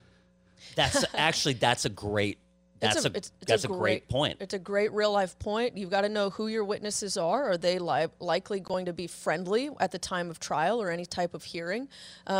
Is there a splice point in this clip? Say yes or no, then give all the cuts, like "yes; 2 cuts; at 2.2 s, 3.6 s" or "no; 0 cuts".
no; 0 cuts